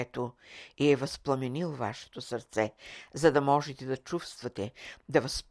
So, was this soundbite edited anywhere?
no; 0 cuts

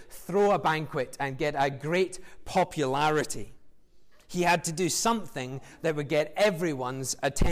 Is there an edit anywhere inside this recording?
no; 0 cuts

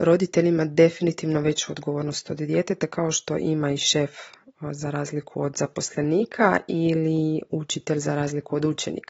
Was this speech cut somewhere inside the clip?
no; 0 cuts

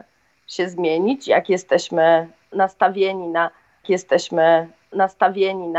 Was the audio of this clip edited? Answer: yes; 1 cut; at 3.8 s

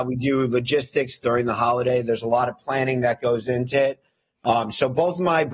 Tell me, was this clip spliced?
no; 0 cuts

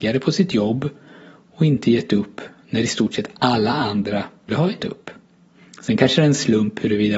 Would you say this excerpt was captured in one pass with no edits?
no; 2 cuts; at 4.5 s, 4.8 s

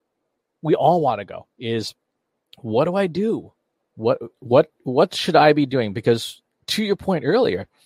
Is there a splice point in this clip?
no; 0 cuts

